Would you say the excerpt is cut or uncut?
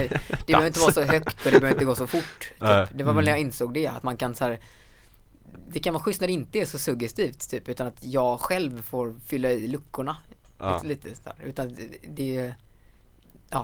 uncut